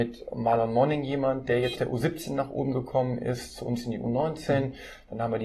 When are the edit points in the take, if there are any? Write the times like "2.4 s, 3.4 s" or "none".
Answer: 1.7 s